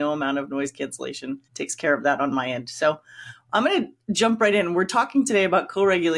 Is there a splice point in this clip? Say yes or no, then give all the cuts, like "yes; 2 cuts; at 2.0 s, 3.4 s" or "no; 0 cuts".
yes; 1 cut; at 1.4 s